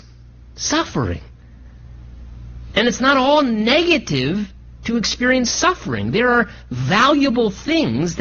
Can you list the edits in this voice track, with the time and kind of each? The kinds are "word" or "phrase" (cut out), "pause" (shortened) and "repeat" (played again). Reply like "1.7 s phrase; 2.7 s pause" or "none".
none